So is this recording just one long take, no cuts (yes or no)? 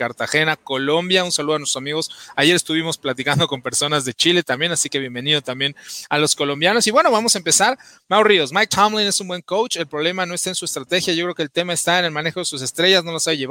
yes